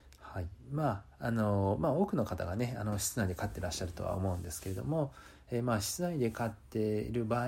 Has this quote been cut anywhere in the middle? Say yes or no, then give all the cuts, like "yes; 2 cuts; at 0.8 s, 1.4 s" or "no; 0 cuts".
no; 0 cuts